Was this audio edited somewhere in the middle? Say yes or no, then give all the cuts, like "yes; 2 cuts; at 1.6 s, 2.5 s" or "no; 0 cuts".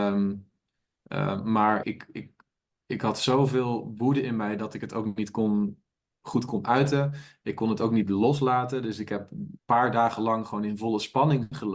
yes; 1 cut; at 1.8 s